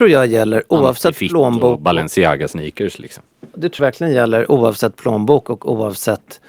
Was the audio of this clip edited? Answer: yes; 1 cut; at 3.8 s

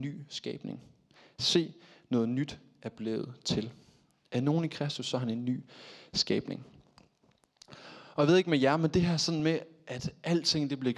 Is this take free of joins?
yes; 0 cuts

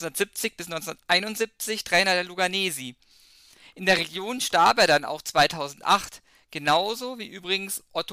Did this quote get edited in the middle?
no; 0 cuts

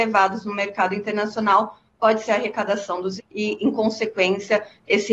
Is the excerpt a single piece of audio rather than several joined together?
no; 2 cuts; at 2.3 s, 3.2 s

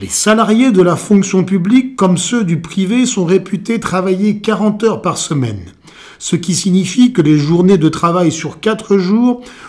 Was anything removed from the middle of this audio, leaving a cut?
no; 0 cuts

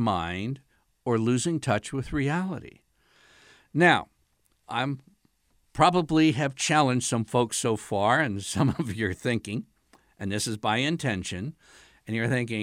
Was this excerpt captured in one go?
yes; 0 cuts

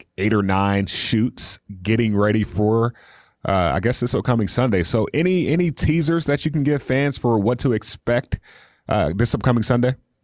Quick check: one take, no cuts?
yes; 0 cuts

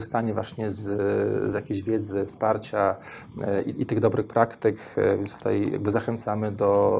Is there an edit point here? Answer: no; 0 cuts

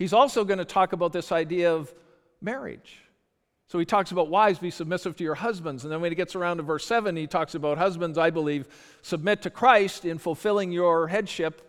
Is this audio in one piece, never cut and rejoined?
yes; 0 cuts

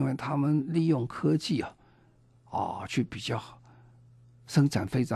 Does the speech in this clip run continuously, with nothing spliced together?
yes; 0 cuts

